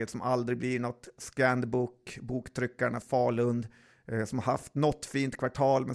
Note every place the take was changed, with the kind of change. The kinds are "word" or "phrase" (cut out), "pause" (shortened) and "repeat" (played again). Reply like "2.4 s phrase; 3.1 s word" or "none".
3.0 s word